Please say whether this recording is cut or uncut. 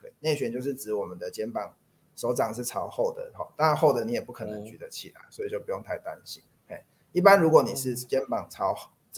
uncut